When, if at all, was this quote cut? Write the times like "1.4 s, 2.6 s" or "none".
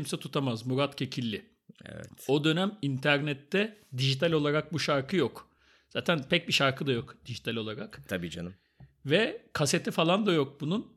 none